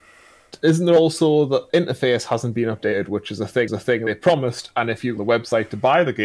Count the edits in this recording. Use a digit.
3